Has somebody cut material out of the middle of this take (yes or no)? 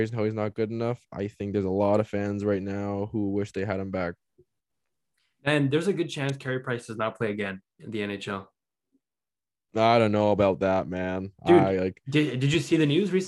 no